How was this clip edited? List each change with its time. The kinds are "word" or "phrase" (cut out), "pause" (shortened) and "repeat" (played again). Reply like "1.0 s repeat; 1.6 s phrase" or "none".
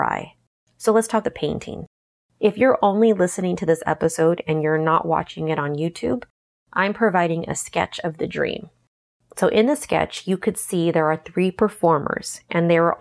1.2 s word